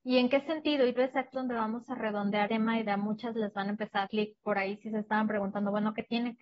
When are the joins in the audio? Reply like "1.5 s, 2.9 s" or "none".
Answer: 1.0 s, 1.3 s, 2.5 s, 2.8 s, 4.1 s